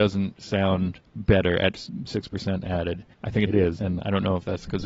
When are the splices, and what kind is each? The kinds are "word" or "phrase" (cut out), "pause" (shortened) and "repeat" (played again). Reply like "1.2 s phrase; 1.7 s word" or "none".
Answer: 1.1 s pause; 3.1 s pause; 3.5 s phrase; 3.8 s word